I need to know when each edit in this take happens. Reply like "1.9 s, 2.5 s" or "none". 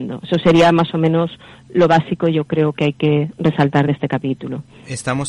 none

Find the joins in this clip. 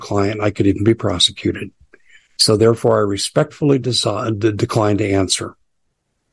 none

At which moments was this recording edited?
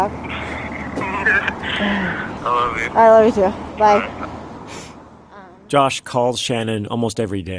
2.4 s

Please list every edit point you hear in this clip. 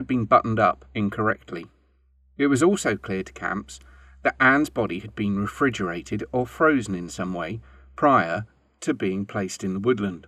none

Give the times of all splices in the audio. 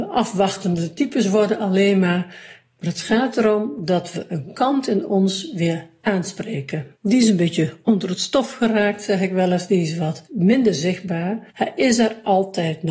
7.0 s, 10.3 s, 11.5 s

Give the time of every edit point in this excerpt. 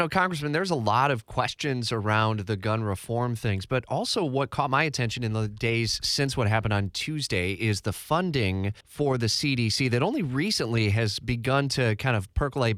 8.8 s

